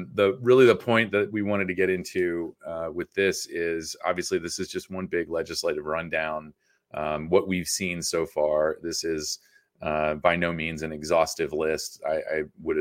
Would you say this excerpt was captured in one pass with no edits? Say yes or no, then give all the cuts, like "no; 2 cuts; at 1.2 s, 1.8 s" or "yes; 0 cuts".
yes; 0 cuts